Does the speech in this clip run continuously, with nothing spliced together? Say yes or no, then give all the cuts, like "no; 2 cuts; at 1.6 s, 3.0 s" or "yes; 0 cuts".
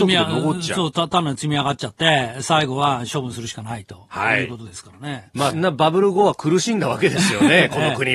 no; 1 cut; at 5.5 s